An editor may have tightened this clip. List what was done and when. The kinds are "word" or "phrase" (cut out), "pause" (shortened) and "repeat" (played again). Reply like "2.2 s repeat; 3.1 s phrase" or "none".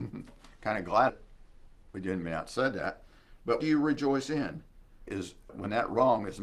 1.1 s word; 2.2 s word; 3.6 s word; 5.1 s phrase; 5.5 s word